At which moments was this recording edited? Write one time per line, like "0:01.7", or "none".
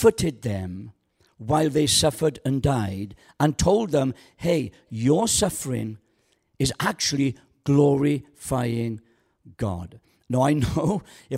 none